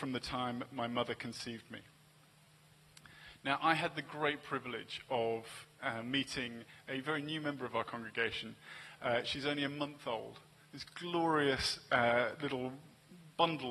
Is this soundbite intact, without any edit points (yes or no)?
yes